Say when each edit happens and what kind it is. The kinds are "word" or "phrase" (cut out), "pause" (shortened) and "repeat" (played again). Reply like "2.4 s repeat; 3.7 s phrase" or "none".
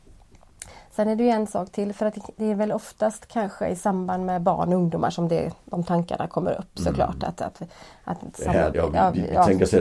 8.7 s word